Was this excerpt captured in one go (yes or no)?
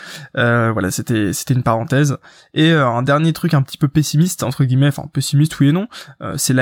yes